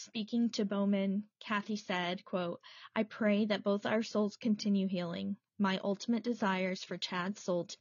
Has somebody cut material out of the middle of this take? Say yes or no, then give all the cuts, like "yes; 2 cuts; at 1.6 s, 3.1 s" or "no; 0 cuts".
no; 0 cuts